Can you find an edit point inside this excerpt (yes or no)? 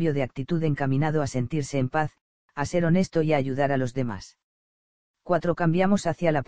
no